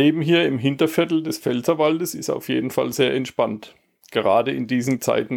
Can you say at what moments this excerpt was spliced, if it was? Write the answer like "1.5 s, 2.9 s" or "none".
none